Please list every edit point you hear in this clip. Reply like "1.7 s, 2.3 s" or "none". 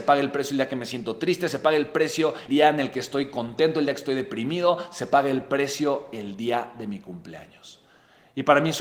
2.5 s